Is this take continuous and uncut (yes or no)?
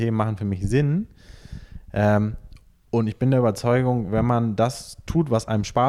yes